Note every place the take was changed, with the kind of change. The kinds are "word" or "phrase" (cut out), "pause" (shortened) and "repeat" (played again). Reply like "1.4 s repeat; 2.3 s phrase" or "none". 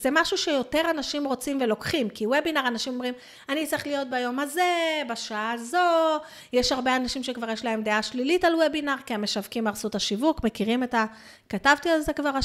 none